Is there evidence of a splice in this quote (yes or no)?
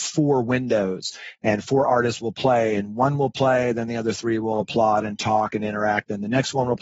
no